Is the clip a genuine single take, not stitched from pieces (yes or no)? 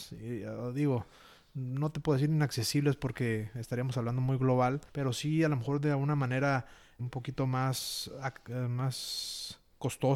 no